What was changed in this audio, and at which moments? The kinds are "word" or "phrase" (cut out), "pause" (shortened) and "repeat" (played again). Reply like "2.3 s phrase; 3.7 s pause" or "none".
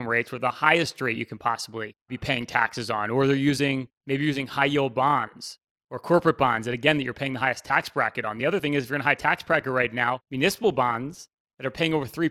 2.0 s pause; 4.0 s pause; 10.2 s pause